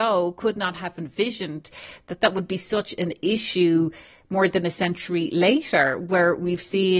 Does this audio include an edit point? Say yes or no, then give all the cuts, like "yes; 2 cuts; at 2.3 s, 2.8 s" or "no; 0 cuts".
no; 0 cuts